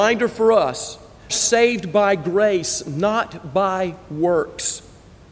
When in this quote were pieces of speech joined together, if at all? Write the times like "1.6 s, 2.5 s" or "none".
1.3 s